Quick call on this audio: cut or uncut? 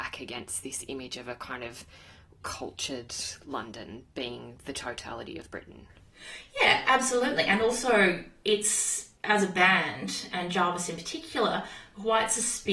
cut